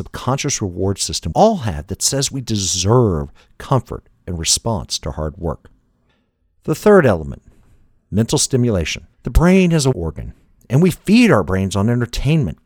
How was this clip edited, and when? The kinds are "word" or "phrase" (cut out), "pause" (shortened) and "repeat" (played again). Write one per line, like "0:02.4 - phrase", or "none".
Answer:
0:01.3 - word
0:09.1 - pause
0:09.9 - word